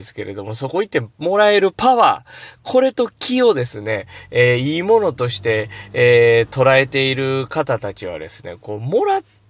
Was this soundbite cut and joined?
no; 0 cuts

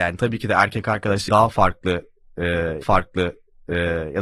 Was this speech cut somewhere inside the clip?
yes; 2 cuts; at 1.3 s, 2.8 s

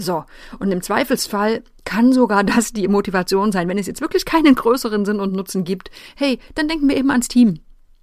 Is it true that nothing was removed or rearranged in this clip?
yes; 0 cuts

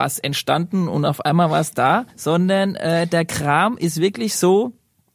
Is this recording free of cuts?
no; 1 cut; at 2.1 s

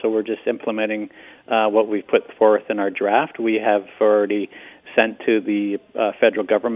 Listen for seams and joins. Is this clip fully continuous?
yes; 0 cuts

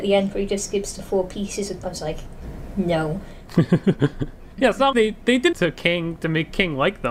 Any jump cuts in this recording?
yes; 3 cuts; at 1.8 s, 4.9 s, 5.5 s

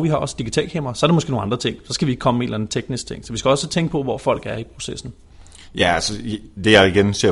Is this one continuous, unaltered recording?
yes; 0 cuts

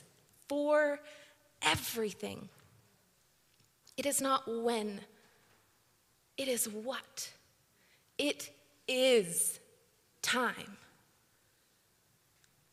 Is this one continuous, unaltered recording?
yes; 0 cuts

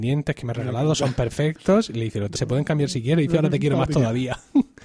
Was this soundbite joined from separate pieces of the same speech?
yes; 1 cut; at 2.4 s

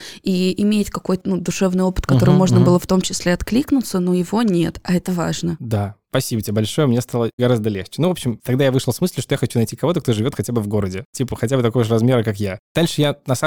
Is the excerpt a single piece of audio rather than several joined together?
no; 1 cut; at 1.2 s

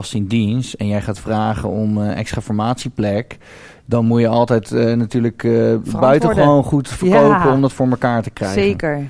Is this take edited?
no; 0 cuts

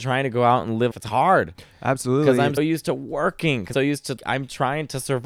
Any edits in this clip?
yes; 4 cuts; at 0.9 s, 2.6 s, 3.7 s, 4.2 s

